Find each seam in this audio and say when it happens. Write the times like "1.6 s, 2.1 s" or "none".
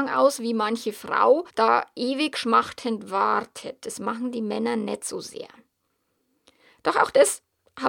1.5 s